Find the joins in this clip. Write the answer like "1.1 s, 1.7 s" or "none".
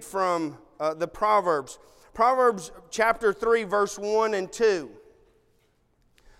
none